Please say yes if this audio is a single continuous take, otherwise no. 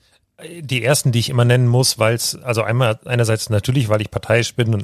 yes